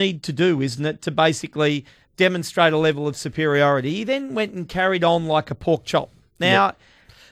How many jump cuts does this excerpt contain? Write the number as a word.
zero